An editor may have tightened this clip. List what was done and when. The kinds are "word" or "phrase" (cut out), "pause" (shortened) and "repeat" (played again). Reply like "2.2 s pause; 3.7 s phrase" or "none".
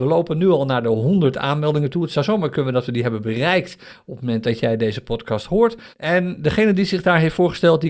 5.9 s pause